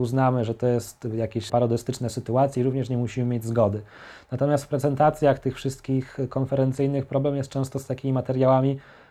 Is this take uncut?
no; 1 cut; at 1.5 s

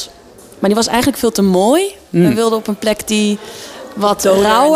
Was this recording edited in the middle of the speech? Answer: no; 0 cuts

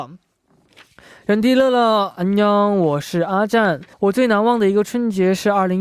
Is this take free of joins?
no; 1 cut; at 3.9 s

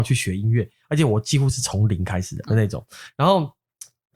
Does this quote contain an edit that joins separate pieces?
yes; 1 cut; at 2.5 s

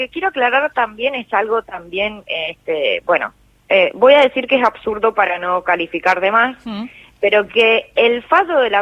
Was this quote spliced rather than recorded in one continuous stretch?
no; 0 cuts

